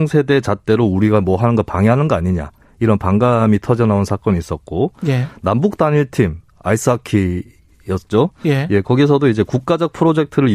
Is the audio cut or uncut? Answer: cut